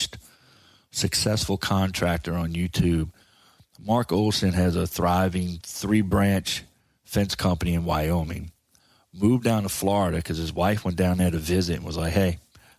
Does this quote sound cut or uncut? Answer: uncut